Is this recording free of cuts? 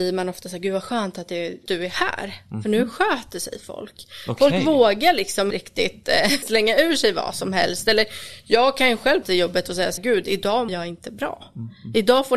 no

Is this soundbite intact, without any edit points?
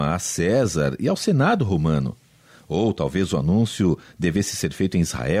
yes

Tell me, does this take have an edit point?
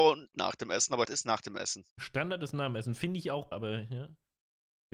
yes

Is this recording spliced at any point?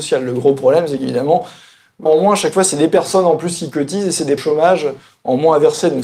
yes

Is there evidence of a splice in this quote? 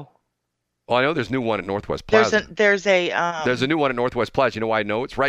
no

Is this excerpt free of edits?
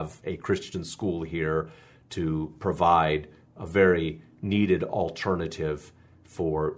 yes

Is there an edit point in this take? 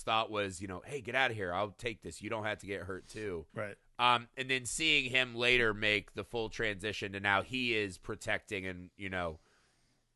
yes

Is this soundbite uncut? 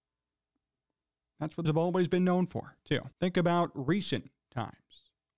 no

